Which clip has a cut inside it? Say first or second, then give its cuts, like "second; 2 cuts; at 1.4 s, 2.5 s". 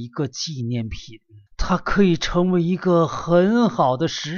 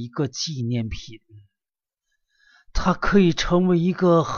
first; 1 cut; at 1.5 s